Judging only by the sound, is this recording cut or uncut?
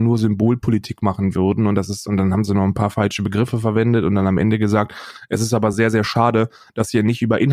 uncut